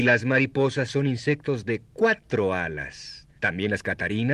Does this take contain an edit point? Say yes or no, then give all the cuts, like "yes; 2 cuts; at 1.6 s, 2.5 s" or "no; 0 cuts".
yes; 1 cut; at 3.4 s